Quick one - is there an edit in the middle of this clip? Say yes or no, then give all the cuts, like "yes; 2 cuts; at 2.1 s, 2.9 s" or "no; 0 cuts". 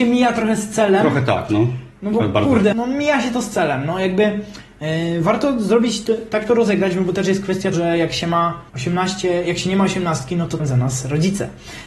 yes; 4 cuts; at 2.7 s, 7.7 s, 8.7 s, 10.6 s